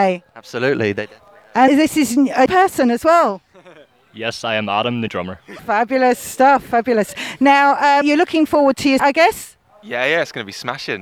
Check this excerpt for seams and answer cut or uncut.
cut